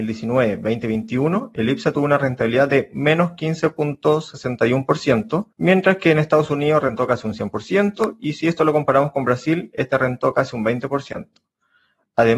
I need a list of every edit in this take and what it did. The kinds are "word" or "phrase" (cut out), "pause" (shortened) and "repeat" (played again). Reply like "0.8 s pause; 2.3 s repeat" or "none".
5.5 s pause